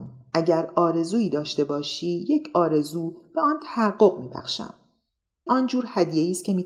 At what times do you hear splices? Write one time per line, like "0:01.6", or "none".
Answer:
0:05.5